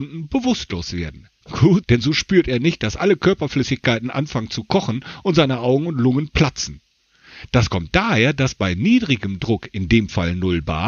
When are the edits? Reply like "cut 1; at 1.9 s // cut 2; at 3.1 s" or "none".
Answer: cut 1; at 1.8 s

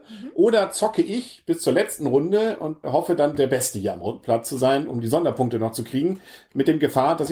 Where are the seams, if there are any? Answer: cut 1; at 2.8 s

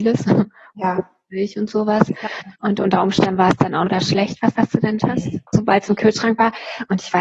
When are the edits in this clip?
cut 1; at 2.5 s // cut 2; at 3.9 s // cut 3; at 4.5 s // cut 4; at 5.0 s // cut 5; at 5.5 s

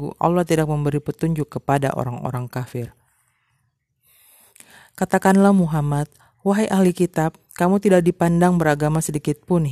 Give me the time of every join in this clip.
none

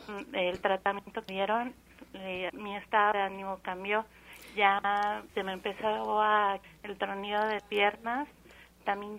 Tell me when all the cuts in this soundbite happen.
cut 1; at 1.3 s // cut 2; at 2.5 s // cut 3; at 3.1 s // cut 4; at 5.3 s // cut 5; at 6.6 s // cut 6; at 7.6 s

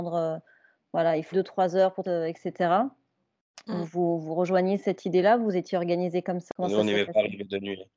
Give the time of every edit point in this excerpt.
cut 1; at 1.3 s // cut 2; at 2.0 s

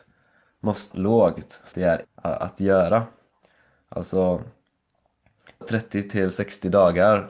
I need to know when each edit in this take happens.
cut 1; at 0.9 s // cut 2; at 1.7 s // cut 3; at 2.0 s // cut 4; at 5.6 s

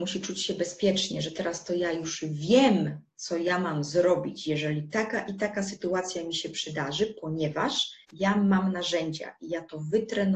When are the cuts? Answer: cut 1; at 8.0 s

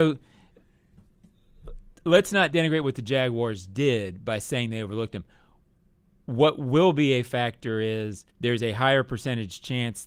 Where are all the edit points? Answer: cut 1; at 2.0 s // cut 2; at 8.3 s

